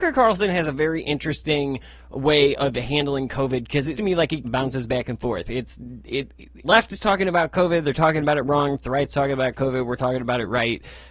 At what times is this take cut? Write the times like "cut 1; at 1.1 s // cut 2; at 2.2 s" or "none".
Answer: cut 1; at 3.9 s // cut 2; at 4.4 s // cut 3; at 6.6 s